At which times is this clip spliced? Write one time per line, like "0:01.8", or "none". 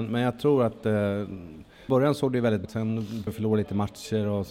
0:01.9
0:02.6
0:03.3